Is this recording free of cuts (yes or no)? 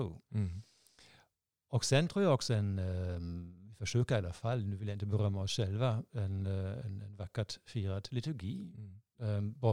yes